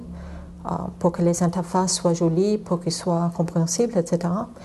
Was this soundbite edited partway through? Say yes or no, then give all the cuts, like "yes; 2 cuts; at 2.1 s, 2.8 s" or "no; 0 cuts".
no; 0 cuts